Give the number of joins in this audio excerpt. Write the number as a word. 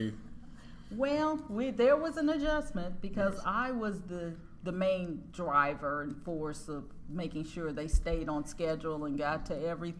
zero